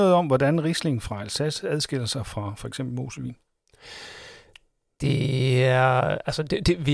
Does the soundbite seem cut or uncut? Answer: uncut